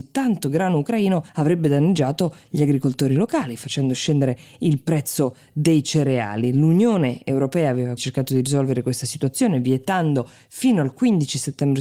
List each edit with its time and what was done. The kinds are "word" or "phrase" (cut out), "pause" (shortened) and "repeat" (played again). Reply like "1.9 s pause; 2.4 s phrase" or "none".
1.3 s pause; 8.0 s word

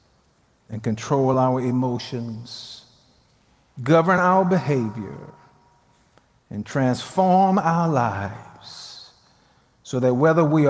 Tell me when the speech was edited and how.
none

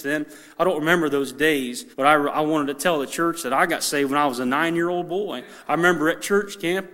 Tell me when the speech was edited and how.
1.9 s pause

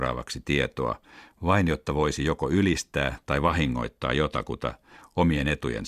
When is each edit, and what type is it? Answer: none

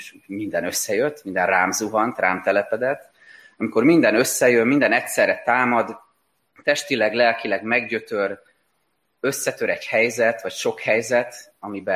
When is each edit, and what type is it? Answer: none

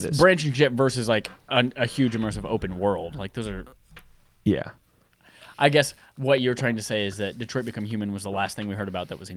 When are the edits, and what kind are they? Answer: none

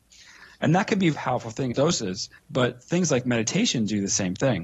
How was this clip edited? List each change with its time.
1.1 s word; 1.7 s phrase; 2.4 s pause

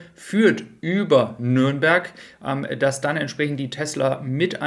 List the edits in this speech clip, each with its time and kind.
none

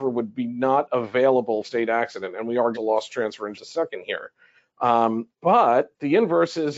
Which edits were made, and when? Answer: 1.6 s phrase; 2.7 s phrase; 3.5 s word; 5.3 s pause

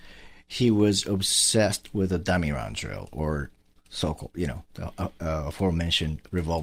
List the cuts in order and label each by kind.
none

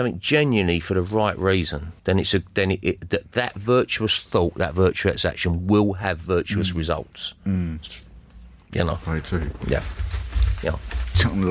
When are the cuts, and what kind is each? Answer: 2.0 s pause

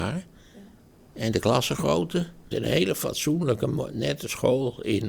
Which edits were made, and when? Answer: 2.5 s word

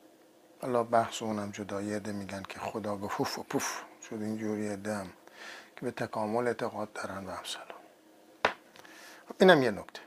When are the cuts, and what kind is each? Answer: none

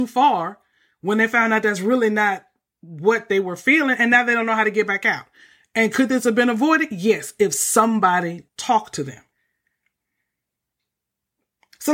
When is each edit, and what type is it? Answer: 8.5 s word

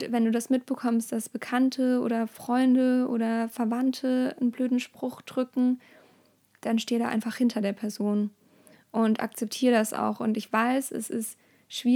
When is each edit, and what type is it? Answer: none

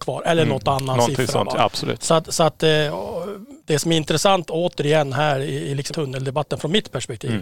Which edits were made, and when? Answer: 3.6 s pause; 5.9 s word

